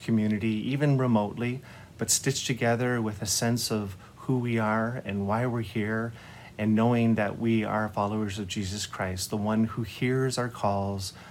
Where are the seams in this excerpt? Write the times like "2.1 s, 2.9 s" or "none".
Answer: none